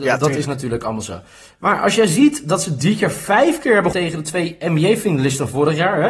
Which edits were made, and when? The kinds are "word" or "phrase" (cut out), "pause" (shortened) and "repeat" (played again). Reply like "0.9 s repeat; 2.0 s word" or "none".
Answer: 3.9 s word